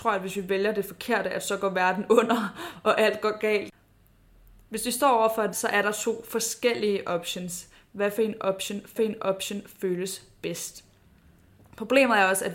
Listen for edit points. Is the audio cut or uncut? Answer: cut